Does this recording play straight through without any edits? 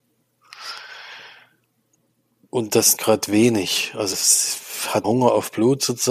no; 3 cuts; at 3.0 s, 4.1 s, 5.0 s

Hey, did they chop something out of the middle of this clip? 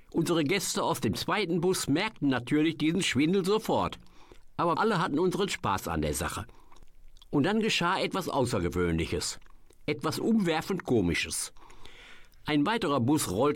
yes; 1 cut; at 4.7 s

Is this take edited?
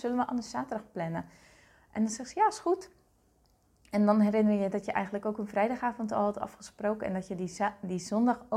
no; 0 cuts

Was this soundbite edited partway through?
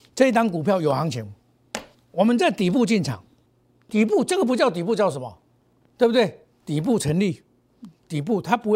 yes; 2 cuts; at 1.9 s, 3.5 s

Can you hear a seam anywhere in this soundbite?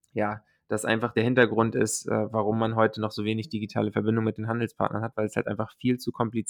no; 0 cuts

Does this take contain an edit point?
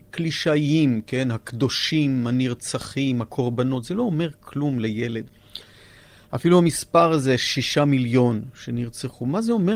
no; 0 cuts

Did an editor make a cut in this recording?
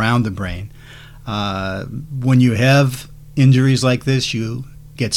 no; 0 cuts

